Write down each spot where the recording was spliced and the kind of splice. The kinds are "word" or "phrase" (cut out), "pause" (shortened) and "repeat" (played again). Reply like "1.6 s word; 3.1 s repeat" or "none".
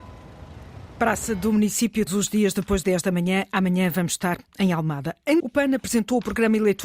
2.1 s word; 2.8 s phrase; 5.4 s word